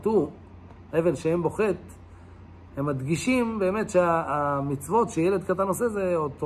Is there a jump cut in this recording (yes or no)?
no